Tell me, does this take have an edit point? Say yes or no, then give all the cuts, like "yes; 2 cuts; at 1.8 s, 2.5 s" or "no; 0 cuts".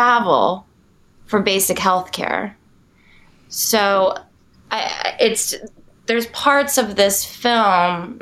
no; 0 cuts